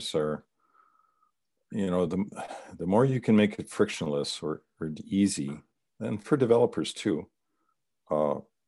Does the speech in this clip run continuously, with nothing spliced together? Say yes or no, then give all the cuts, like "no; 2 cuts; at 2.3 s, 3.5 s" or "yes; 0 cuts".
yes; 0 cuts